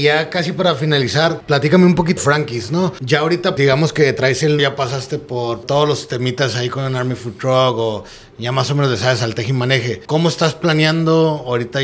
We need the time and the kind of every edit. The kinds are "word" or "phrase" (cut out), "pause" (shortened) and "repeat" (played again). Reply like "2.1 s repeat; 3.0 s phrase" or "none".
2.2 s word; 4.6 s word